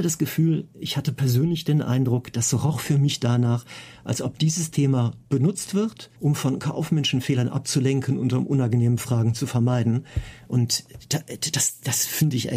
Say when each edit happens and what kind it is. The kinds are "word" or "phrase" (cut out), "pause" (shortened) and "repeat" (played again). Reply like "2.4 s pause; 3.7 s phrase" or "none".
6.2 s pause